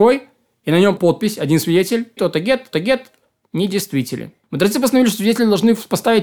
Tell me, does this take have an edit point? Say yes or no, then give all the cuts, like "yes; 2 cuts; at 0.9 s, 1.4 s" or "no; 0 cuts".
yes; 4 cuts; at 1.0 s, 2.2 s, 2.7 s, 4.4 s